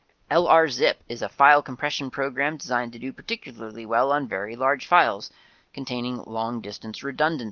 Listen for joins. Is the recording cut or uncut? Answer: uncut